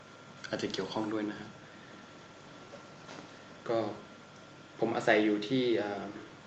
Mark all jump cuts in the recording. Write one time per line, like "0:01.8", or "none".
none